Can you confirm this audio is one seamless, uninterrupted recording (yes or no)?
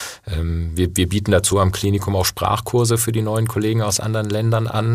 yes